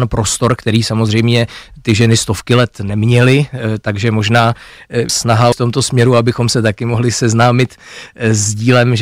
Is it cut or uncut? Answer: cut